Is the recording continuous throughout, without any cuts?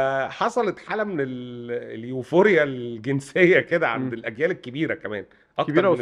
yes; 0 cuts

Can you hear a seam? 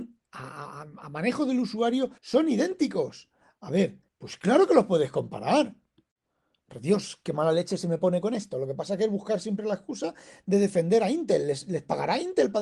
yes; 2 cuts; at 2.2 s, 4.1 s

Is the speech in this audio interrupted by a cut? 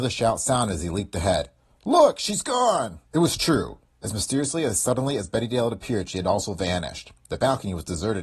yes; 1 cut; at 3.1 s

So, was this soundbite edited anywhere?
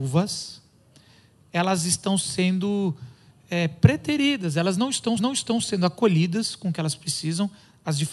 yes; 1 cut; at 5.2 s

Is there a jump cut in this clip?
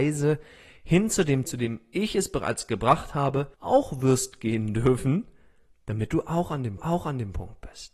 yes; 3 cuts; at 1.5 s, 3.5 s, 6.8 s

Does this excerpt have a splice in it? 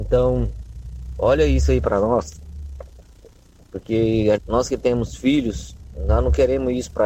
yes; 1 cut; at 4.4 s

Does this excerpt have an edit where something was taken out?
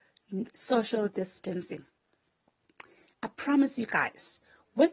no; 0 cuts

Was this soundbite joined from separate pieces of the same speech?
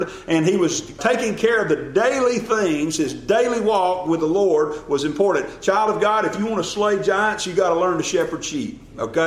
yes; 1 cut; at 1.0 s

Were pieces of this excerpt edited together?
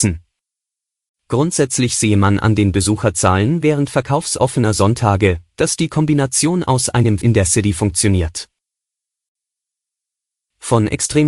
yes; 1 cut; at 7.2 s

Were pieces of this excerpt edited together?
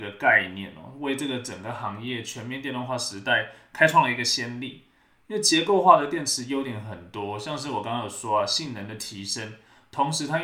no; 0 cuts

